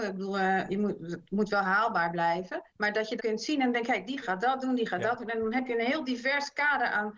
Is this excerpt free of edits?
no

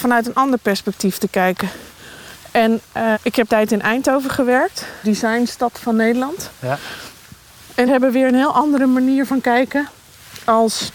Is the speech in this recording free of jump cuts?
no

